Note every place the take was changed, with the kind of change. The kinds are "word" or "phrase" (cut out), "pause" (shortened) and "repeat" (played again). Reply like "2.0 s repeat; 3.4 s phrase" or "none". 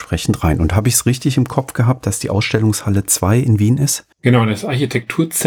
4.1 s pause